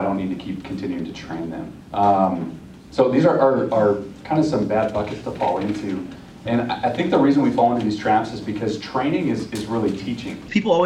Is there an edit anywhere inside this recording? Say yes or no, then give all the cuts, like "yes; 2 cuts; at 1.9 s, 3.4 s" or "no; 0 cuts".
yes; 1 cut; at 1.8 s